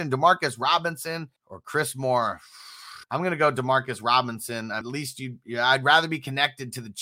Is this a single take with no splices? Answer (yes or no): no